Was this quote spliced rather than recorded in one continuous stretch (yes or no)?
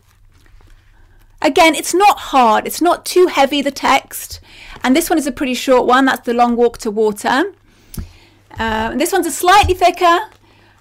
no